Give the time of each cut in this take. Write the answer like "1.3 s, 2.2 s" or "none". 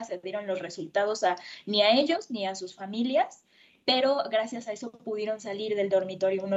none